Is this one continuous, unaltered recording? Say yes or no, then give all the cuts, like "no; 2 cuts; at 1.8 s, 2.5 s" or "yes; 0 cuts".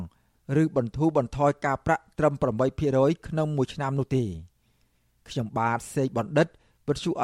yes; 0 cuts